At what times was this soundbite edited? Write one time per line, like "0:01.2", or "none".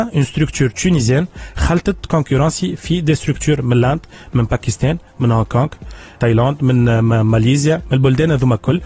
0:06.2